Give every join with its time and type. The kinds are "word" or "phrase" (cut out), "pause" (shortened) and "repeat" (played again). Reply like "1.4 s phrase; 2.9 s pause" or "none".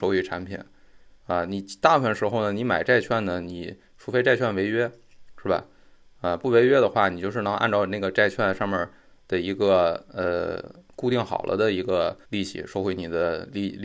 12.2 s pause

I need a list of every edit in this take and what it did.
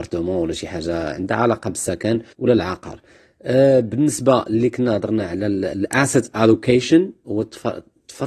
2.3 s pause

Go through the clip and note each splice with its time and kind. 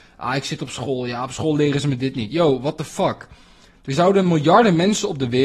none

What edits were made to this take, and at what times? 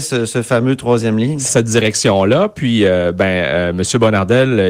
1.5 s phrase

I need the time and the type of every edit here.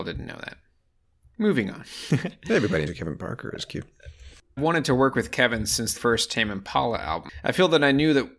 2.9 s word; 4.6 s phrase; 6.0 s word

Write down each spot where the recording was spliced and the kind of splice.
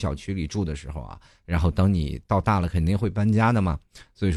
none

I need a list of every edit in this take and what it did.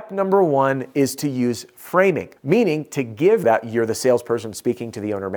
2.4 s pause; 3.4 s phrase

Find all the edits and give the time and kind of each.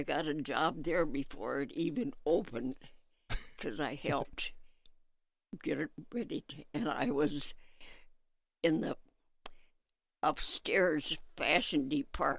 none

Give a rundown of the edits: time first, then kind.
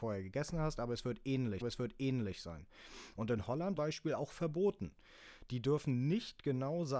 1.6 s repeat; 3.8 s phrase

